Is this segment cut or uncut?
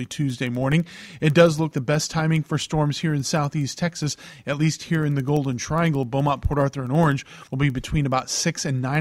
cut